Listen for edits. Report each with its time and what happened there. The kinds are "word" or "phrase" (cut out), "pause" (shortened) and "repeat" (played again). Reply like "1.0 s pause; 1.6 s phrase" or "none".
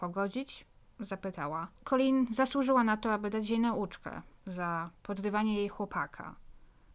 1.7 s pause